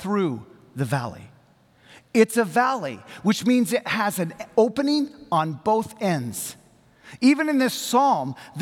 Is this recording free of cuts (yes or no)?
yes